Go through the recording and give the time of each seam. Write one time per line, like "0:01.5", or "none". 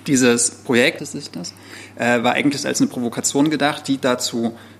0:01.0